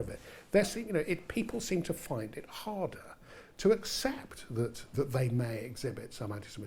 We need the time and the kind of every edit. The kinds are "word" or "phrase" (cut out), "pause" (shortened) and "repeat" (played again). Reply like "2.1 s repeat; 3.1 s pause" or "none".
4.9 s phrase